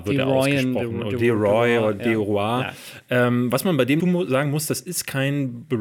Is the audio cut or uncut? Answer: cut